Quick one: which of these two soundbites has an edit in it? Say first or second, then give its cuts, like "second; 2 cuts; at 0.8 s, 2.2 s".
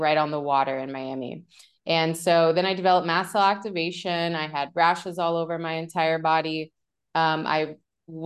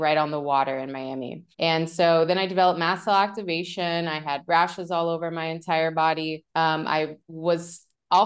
second; 3 cuts; at 1.5 s, 6.5 s, 7.2 s